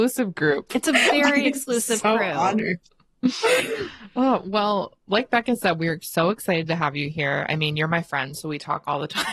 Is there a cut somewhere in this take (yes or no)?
yes